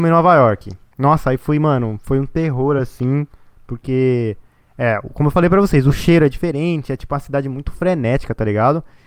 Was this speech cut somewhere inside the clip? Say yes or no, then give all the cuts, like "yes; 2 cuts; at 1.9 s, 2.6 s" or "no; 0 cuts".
no; 0 cuts